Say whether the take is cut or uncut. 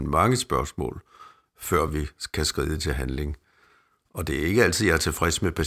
uncut